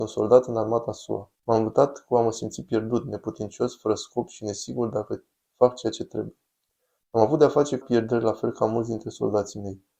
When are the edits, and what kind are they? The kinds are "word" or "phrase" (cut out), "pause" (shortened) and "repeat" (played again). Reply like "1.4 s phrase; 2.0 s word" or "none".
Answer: 1.3 s pause; 7.8 s word